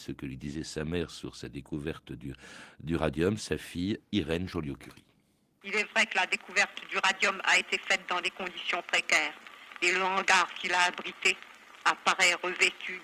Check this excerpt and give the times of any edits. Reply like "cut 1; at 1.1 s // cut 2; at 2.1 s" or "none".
none